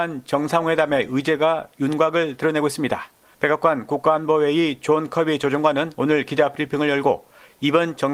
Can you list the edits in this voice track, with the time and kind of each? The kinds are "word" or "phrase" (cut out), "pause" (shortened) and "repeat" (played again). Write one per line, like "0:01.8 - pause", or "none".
none